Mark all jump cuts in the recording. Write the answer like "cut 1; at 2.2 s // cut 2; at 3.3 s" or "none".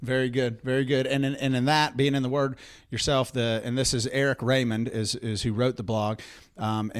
none